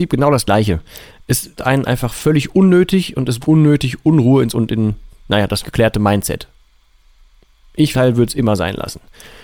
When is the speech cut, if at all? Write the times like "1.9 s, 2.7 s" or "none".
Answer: 1.6 s, 3.4 s, 4.5 s, 5.6 s, 7.9 s